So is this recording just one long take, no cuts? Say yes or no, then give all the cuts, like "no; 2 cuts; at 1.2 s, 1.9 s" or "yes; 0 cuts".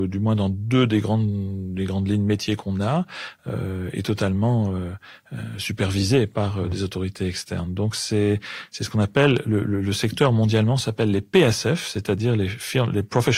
yes; 0 cuts